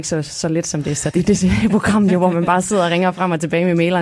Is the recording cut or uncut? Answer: cut